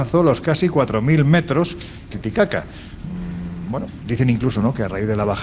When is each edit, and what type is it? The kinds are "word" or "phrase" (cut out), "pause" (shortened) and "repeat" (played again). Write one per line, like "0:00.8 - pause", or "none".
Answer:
0:02.1 - phrase